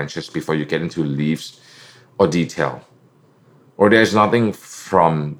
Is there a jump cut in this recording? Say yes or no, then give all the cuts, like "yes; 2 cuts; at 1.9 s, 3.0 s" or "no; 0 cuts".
no; 0 cuts